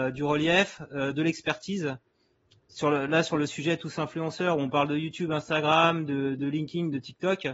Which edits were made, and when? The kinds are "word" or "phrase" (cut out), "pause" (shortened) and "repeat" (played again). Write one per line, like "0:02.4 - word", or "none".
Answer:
none

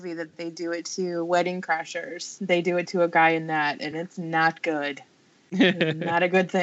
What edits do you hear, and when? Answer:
none

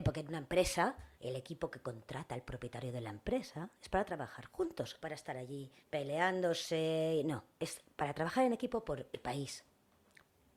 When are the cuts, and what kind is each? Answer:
0:01.1 - pause
0:05.0 - word
0:05.8 - pause

